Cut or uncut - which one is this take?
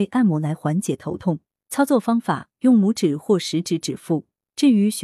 uncut